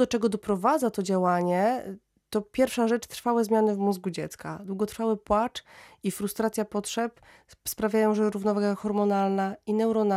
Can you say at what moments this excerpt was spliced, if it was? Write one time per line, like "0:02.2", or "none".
none